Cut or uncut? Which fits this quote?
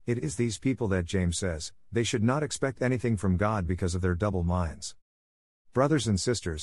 uncut